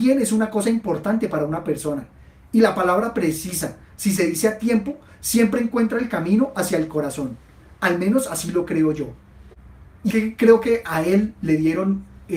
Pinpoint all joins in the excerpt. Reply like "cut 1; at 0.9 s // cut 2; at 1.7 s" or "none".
cut 1; at 10.1 s